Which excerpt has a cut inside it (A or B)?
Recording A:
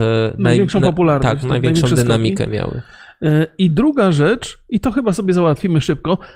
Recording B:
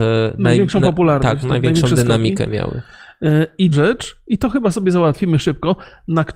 B